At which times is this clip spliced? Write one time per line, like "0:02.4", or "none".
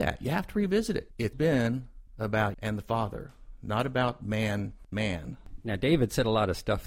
0:01.3
0:02.5
0:04.9